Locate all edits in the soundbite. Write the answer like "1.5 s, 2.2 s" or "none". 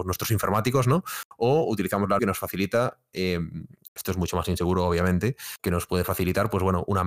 2.2 s, 5.6 s